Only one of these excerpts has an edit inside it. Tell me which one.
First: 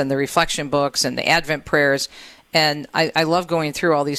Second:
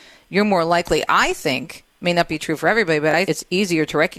second; 1 cut; at 3.3 s

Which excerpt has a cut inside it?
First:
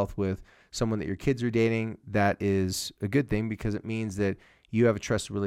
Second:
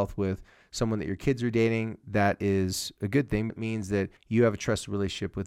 second; 2 cuts; at 3.5 s, 4.2 s

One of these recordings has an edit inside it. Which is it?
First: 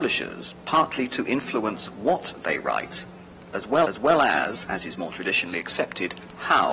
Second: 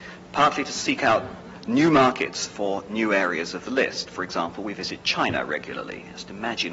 first; 1 cut; at 3.8 s

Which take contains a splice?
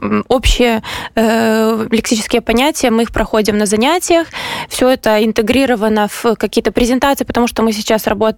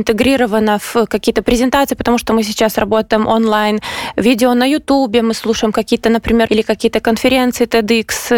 second; 1 cut; at 6.5 s

